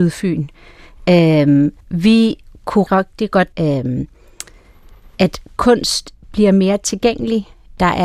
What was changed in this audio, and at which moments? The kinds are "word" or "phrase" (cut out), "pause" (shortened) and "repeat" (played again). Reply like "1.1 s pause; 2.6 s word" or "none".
1.8 s pause; 2.9 s word; 3.5 s phrase; 6.2 s pause